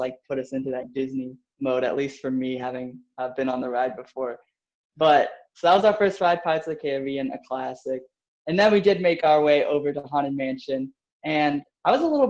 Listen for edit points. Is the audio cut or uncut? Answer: uncut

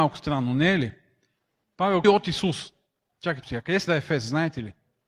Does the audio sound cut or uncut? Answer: cut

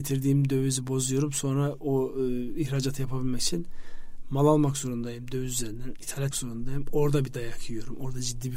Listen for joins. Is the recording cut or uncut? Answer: cut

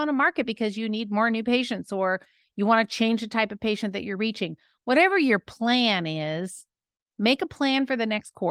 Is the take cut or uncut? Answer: uncut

